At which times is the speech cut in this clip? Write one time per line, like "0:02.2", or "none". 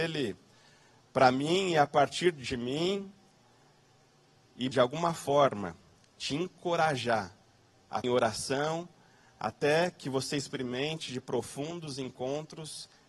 0:04.7
0:08.0